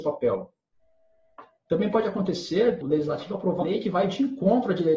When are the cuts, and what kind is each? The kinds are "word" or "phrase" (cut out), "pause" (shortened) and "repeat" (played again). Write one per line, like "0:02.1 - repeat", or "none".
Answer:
0:02.8 - word
0:03.6 - word